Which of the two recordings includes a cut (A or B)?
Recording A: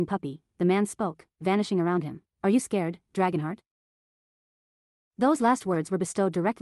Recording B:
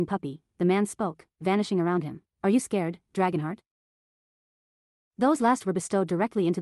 B